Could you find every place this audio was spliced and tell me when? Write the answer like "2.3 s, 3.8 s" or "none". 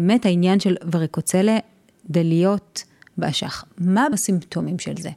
4.1 s